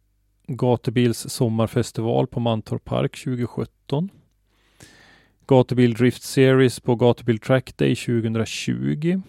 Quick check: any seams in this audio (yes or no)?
no